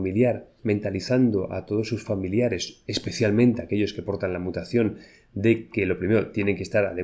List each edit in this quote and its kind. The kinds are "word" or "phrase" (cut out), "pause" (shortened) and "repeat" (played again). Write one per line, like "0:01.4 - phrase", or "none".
none